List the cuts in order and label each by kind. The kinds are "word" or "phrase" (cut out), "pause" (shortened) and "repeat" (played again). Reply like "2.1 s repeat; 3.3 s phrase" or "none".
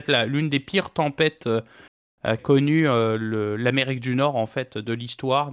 2.4 s word